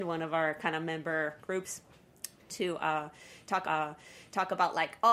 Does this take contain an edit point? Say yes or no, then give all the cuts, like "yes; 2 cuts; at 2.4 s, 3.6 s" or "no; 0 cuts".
yes; 2 cuts; at 1.4 s, 3.6 s